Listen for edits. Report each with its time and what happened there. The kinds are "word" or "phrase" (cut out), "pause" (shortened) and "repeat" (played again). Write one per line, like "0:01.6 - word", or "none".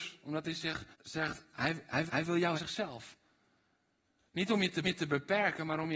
0:00.9 - pause
0:02.1 - repeat
0:02.6 - phrase
0:04.8 - repeat